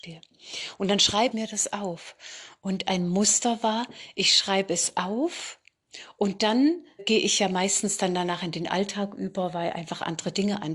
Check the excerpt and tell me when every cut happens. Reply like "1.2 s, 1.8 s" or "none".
1.3 s, 7.0 s